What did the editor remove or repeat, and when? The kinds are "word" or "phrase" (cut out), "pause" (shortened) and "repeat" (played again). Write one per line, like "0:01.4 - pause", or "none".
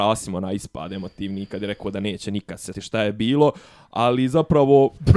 0:02.7 - word